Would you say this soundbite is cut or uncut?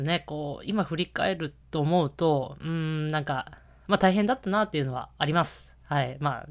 uncut